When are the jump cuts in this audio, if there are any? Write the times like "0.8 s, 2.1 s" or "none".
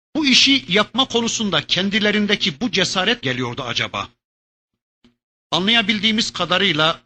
3.2 s